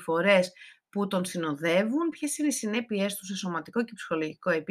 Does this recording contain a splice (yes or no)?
no